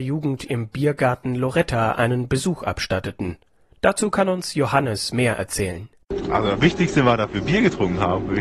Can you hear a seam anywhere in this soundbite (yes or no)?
no